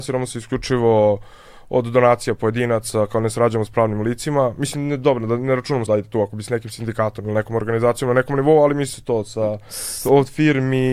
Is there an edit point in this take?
yes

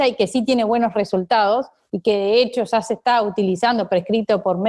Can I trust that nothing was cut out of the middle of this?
yes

